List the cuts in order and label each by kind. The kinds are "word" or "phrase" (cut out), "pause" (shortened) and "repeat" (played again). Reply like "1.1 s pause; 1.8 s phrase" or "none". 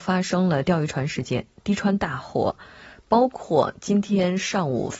none